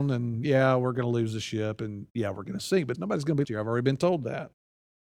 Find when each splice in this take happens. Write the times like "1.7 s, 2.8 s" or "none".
2.9 s, 3.4 s